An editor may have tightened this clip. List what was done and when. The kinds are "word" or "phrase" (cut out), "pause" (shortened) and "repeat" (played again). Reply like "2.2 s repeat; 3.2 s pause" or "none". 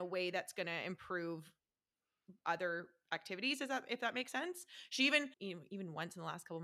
5.3 s pause